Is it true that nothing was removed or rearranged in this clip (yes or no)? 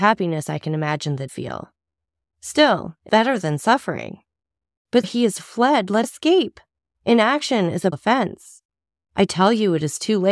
no